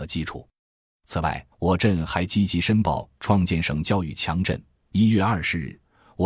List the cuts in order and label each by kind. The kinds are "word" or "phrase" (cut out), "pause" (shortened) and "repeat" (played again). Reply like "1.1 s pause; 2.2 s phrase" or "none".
1.5 s pause